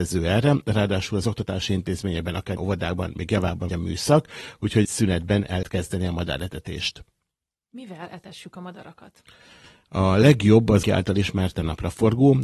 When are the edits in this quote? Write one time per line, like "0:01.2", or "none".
0:02.6
0:03.7
0:04.8
0:05.6
0:10.8
0:11.5